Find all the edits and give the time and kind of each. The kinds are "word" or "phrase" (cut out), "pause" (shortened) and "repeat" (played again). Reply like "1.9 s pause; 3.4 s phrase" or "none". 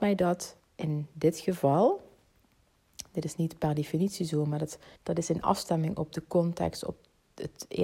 5.0 s pause

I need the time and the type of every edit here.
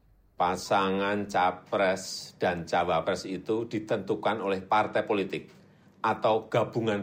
none

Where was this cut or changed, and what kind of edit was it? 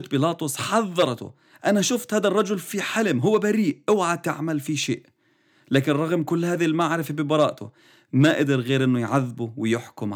none

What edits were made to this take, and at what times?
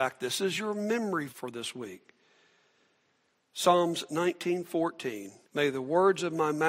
1.3 s word; 5.4 s pause

